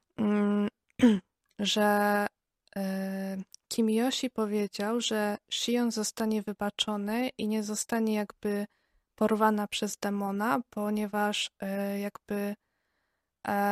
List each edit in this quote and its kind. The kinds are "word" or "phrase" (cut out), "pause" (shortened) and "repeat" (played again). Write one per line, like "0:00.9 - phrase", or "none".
none